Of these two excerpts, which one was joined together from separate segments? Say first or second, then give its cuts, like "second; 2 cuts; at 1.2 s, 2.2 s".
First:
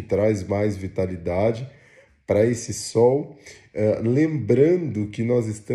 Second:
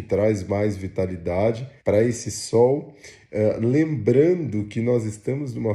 second; 1 cut; at 1.8 s